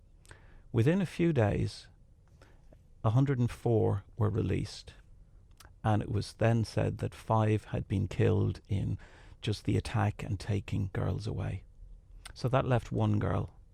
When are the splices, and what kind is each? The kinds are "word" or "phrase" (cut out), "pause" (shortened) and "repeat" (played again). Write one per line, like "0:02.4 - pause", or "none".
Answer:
0:10.9 - word